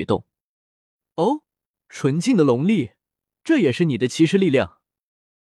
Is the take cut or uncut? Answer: cut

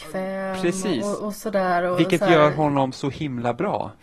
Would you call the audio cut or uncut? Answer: uncut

